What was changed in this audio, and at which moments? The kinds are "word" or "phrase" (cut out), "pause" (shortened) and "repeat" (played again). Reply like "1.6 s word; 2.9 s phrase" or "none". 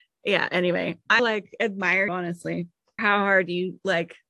1.2 s word; 2.1 s word; 3.0 s word